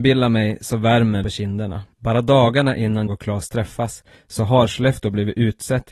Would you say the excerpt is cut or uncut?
cut